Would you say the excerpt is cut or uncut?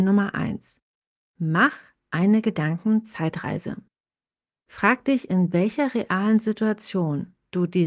uncut